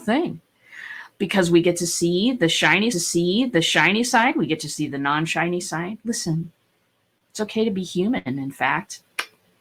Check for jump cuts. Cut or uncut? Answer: cut